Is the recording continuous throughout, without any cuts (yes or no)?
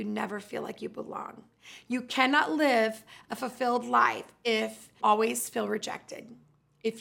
no